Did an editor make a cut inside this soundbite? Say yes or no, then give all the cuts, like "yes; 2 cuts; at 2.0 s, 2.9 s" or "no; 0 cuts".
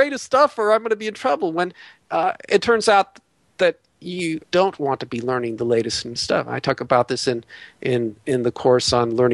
yes; 2 cuts; at 4.4 s, 6.2 s